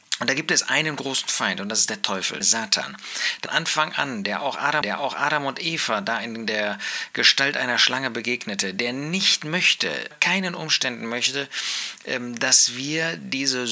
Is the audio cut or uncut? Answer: cut